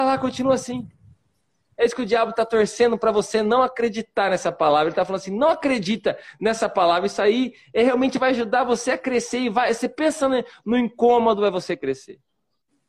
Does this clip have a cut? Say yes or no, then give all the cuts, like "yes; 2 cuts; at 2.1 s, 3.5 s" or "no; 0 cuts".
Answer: no; 0 cuts